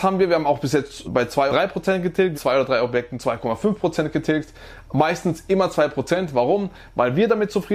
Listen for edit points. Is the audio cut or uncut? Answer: cut